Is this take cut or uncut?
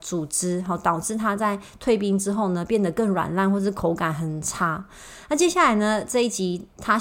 uncut